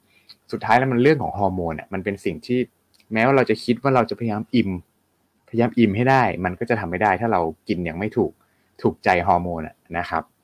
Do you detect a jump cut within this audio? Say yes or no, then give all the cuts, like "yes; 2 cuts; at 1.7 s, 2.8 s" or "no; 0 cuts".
no; 0 cuts